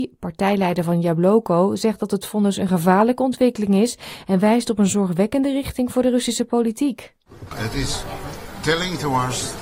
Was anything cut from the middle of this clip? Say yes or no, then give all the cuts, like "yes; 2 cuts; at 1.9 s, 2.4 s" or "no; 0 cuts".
no; 0 cuts